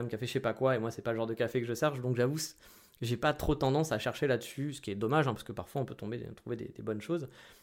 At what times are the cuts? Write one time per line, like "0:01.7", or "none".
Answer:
none